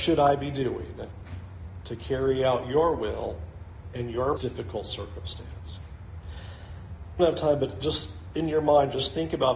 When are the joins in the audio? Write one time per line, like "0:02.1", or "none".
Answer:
0:04.4
0:07.2